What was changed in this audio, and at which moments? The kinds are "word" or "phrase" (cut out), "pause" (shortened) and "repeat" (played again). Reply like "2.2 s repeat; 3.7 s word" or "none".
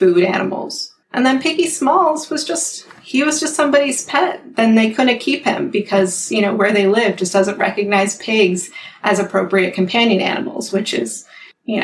1.0 s pause